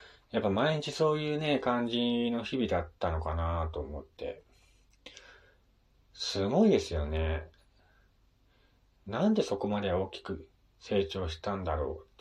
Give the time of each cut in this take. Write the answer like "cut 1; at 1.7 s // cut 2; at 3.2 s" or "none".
cut 1; at 5.7 s